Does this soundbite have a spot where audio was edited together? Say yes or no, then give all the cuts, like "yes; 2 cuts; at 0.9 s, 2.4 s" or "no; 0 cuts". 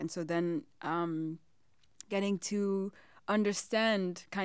no; 0 cuts